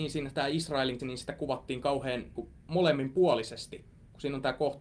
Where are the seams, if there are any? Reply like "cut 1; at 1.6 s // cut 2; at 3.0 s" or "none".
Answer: cut 1; at 1.0 s // cut 2; at 2.4 s